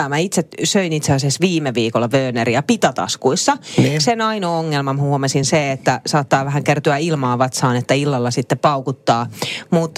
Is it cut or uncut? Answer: uncut